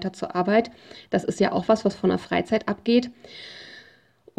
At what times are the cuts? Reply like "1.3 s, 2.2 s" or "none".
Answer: none